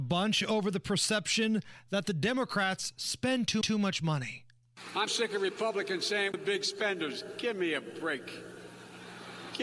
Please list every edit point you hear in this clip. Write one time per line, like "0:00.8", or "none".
0:03.6
0:05.1
0:06.3